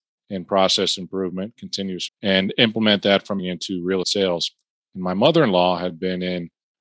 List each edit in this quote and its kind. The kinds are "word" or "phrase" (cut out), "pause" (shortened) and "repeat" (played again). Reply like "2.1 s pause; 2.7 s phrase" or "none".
2.1 s word; 3.4 s word; 4.0 s word

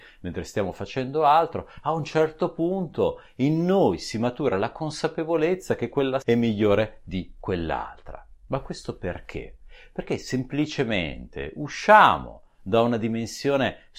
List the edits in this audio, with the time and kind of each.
6.2 s word

